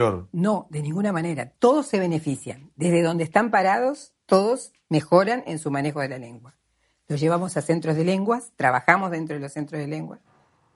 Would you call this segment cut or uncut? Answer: uncut